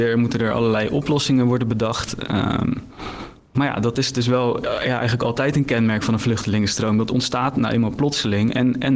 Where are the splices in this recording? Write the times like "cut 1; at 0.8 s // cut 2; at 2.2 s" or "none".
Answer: none